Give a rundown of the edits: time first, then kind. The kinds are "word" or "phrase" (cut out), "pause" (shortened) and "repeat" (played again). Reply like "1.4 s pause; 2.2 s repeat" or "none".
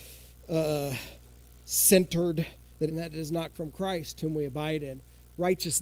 2.9 s phrase; 3.5 s word